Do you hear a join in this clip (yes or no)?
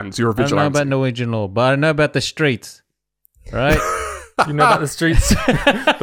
no